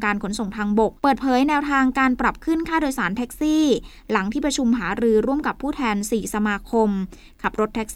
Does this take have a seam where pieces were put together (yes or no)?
yes